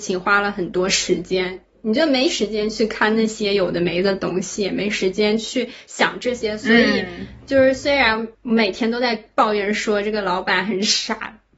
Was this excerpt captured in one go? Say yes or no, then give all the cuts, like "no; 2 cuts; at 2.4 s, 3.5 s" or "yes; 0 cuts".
no; 1 cut; at 8.3 s